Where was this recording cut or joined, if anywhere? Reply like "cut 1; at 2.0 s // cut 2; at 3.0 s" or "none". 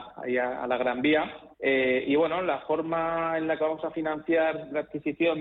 cut 1; at 1.5 s